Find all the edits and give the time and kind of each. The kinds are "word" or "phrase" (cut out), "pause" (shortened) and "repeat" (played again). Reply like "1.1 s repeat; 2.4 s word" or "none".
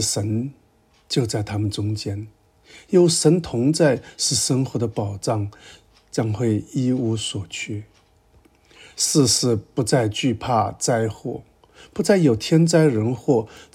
none